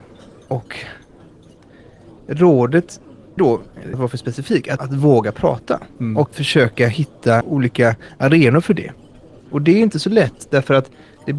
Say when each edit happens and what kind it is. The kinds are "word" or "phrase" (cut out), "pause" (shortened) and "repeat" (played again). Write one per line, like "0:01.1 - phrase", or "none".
0:03.4 - word
0:03.9 - word
0:04.8 - word
0:06.3 - word
0:07.4 - word